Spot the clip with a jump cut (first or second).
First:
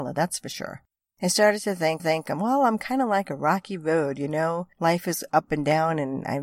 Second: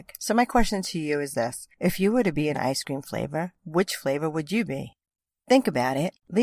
first